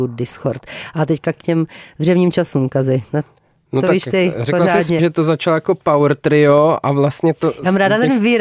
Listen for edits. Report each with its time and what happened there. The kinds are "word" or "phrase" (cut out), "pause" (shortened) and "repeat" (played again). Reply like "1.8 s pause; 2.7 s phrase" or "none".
1.4 s word; 5.0 s word

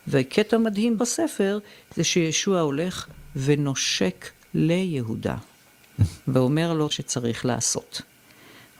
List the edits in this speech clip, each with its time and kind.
1.0 s word; 6.2 s pause; 6.9 s phrase

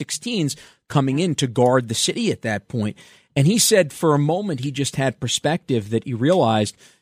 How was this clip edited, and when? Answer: none

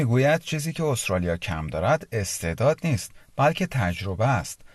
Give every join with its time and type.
none

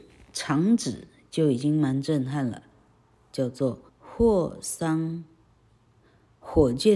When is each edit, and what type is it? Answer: 3.9 s pause

